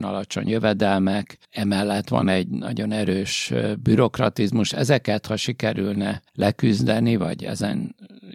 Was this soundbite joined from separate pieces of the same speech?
yes; 2 cuts; at 1.4 s, 6.3 s

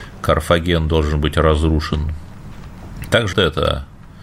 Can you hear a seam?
yes; 1 cut; at 3.3 s

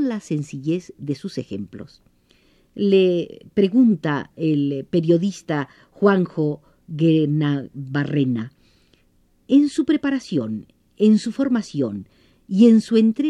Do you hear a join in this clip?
no; 0 cuts

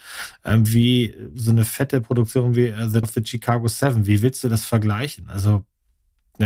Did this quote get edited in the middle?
yes; 1 cut; at 3.0 s

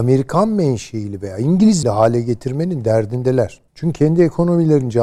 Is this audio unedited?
no; 2 cuts; at 1.8 s, 3.7 s

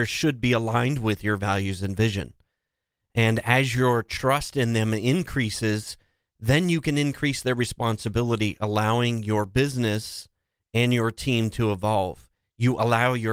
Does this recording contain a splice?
no; 0 cuts

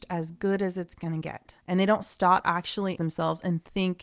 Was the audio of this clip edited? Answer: yes; 3 cuts; at 1.6 s, 2.4 s, 3.0 s

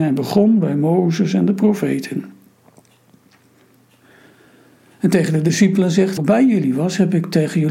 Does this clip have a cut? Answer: yes; 1 cut; at 6.2 s

